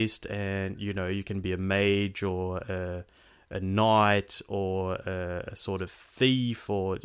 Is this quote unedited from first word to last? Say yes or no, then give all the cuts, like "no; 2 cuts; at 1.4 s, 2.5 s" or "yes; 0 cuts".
yes; 0 cuts